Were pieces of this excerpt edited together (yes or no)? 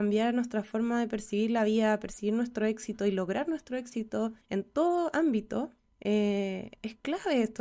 yes